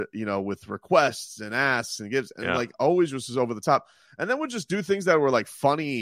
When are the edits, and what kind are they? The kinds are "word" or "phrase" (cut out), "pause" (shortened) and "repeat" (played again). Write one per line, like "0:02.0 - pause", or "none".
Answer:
none